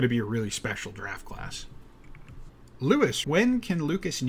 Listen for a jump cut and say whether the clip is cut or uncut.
cut